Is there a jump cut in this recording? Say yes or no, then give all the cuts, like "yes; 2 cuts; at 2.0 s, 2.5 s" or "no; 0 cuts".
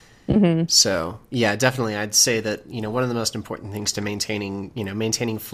no; 0 cuts